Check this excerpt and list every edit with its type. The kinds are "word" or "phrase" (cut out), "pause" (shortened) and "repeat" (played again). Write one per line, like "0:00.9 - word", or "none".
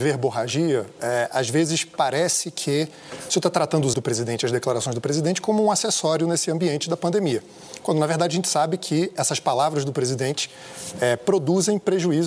0:03.9 - word